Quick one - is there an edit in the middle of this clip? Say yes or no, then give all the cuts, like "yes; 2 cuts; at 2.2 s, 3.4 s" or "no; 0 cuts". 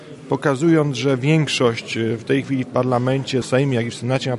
yes; 1 cut; at 3.4 s